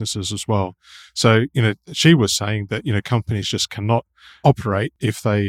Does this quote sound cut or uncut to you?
uncut